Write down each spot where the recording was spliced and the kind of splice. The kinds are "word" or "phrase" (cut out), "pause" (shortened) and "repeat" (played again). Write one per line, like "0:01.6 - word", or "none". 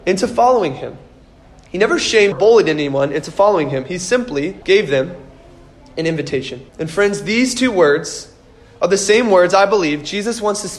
0:02.3 - phrase
0:04.6 - pause
0:06.7 - pause